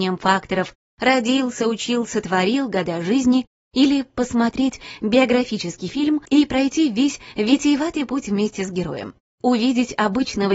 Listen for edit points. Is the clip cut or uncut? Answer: uncut